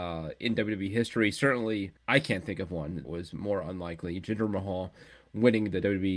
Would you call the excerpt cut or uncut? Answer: cut